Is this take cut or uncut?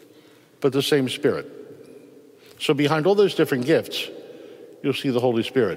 uncut